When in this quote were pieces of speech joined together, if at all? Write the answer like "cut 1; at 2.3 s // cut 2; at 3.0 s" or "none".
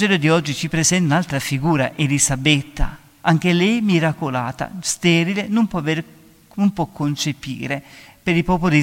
none